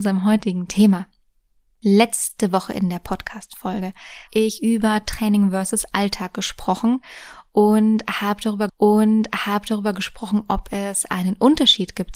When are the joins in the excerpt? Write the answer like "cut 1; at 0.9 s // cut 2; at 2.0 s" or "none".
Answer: cut 1; at 4.3 s // cut 2; at 8.7 s